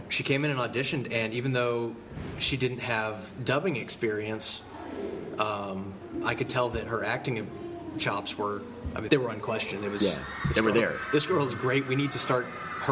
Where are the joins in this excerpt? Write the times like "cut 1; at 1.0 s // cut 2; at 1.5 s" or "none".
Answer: cut 1; at 9.1 s